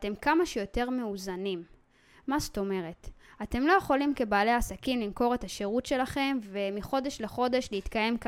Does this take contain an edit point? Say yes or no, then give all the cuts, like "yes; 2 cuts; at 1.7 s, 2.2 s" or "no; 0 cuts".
no; 0 cuts